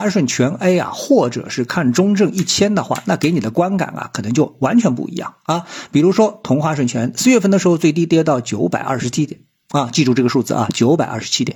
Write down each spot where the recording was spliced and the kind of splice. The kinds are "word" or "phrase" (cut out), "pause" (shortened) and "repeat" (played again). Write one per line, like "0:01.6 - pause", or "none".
none

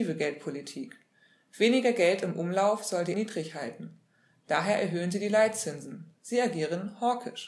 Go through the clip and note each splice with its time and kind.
0:03.1 - word

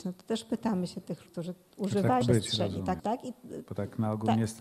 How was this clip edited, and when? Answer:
0:01.3 - word
0:02.2 - word
0:03.0 - phrase

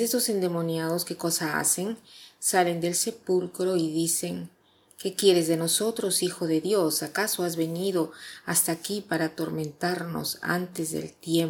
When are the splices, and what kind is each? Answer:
none

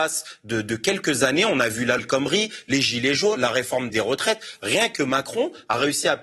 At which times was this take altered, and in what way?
0:02.0 - word
0:03.4 - word
0:03.9 - word

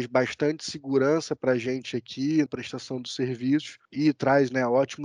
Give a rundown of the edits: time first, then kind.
0:02.5 - word
0:03.8 - pause

